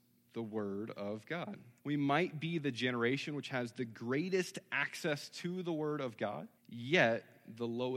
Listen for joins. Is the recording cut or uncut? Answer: cut